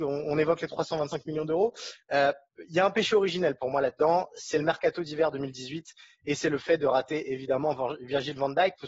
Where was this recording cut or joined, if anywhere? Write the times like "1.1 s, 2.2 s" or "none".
none